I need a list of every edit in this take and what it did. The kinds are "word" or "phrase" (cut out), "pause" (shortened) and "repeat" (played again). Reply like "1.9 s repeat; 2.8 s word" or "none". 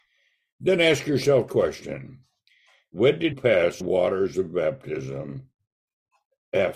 1.5 s word; 3.3 s word; 3.8 s phrase